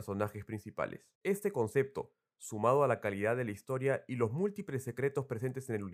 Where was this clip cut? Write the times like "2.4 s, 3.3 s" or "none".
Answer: 1.1 s